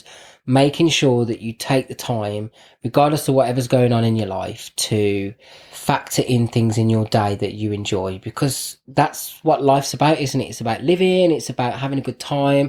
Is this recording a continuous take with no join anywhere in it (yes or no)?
yes